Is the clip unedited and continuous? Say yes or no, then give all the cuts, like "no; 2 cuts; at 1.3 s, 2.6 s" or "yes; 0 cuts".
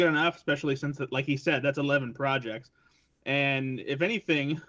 yes; 0 cuts